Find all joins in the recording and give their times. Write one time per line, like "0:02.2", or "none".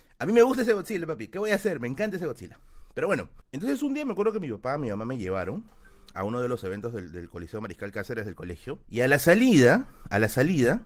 0:03.4
0:08.8